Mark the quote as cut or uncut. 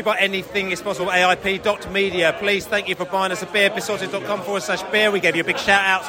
uncut